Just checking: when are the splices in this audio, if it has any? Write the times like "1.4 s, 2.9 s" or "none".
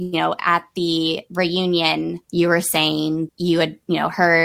2.2 s, 3.3 s